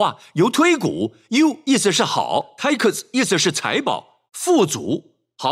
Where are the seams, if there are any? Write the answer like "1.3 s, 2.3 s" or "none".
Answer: 4.3 s